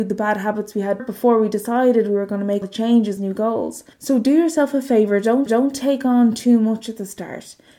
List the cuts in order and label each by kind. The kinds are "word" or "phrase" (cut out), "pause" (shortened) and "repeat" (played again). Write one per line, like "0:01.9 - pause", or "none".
0:01.0 - word
0:02.6 - word
0:03.2 - phrase
0:03.9 - pause
0:05.5 - repeat